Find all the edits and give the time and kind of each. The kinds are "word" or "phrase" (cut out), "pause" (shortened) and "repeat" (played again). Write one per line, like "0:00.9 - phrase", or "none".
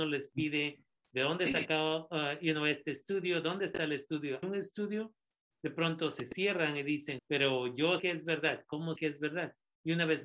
0:04.4 - word
0:07.2 - word
0:08.0 - word
0:09.0 - word